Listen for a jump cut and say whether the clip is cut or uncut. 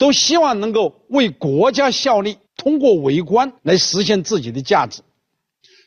cut